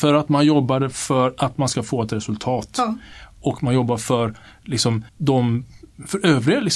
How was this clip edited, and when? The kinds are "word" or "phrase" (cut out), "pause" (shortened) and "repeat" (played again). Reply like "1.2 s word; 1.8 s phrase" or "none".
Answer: 5.1 s pause